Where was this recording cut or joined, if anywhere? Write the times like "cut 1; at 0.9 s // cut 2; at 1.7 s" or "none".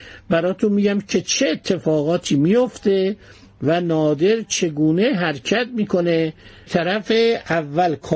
cut 1; at 6.7 s